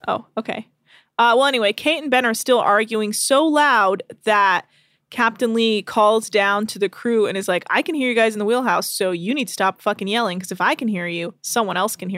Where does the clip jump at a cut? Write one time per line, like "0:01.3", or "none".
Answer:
none